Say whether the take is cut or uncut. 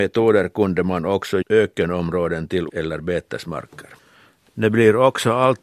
cut